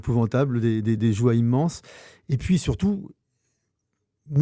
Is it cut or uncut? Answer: uncut